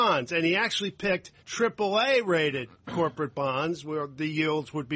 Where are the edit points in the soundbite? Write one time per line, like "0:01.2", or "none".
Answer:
0:01.4